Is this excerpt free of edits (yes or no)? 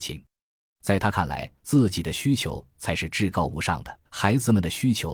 no